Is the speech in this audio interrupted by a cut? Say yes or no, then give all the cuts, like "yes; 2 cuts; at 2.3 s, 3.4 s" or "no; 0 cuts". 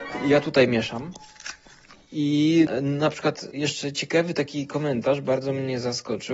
no; 0 cuts